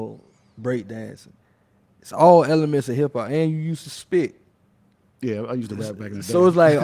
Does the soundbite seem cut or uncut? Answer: uncut